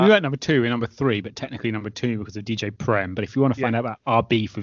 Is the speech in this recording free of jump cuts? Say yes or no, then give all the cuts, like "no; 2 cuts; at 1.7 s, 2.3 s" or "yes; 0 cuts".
yes; 0 cuts